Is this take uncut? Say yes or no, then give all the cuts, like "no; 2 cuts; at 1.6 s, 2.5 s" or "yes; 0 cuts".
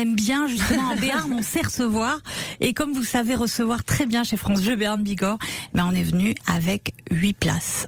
yes; 0 cuts